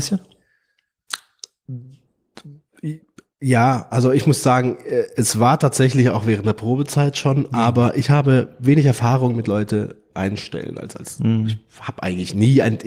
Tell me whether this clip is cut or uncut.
uncut